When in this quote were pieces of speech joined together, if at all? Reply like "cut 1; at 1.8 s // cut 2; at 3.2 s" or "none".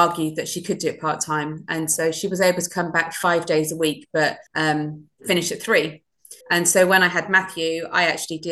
cut 1; at 4.5 s // cut 2; at 6.4 s